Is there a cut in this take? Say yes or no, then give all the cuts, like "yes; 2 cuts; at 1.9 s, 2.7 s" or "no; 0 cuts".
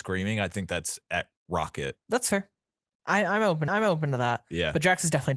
yes; 1 cut; at 3.7 s